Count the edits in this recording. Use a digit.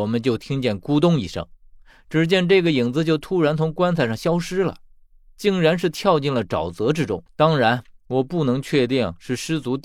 1